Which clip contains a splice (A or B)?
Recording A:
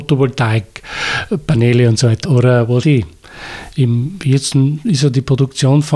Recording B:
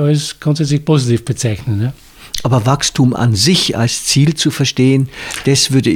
A